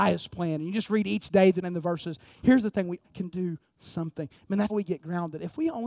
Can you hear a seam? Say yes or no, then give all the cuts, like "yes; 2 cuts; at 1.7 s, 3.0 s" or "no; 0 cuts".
yes; 3 cuts; at 1.6 s, 3.0 s, 4.7 s